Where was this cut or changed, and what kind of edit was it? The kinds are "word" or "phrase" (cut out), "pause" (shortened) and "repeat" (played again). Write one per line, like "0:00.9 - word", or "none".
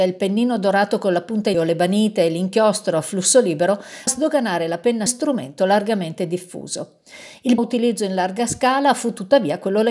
0:01.5 - word
0:04.1 - word
0:05.1 - phrase
0:07.6 - word